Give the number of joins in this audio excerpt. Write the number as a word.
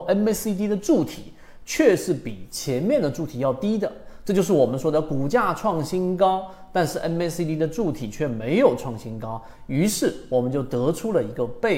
zero